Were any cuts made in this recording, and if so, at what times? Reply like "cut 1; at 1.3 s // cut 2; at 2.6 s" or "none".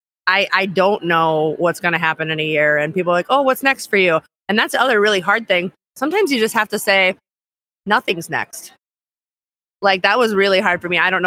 none